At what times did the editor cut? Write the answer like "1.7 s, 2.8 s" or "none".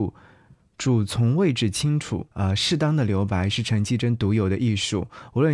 2.3 s